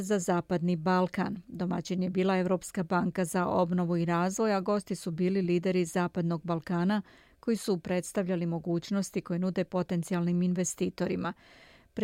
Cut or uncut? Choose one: uncut